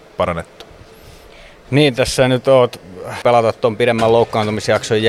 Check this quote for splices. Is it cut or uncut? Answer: cut